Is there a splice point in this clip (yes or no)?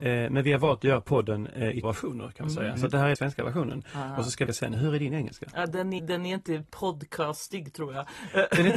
yes